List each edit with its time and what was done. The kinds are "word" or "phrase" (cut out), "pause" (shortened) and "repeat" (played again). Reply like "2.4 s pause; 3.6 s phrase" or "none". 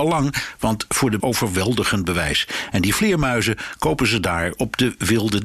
1.2 s phrase